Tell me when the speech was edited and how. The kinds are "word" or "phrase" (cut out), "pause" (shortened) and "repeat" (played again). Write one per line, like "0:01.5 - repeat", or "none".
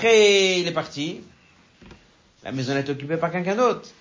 none